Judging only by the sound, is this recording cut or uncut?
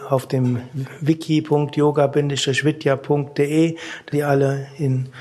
cut